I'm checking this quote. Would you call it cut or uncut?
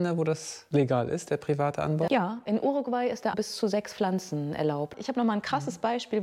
cut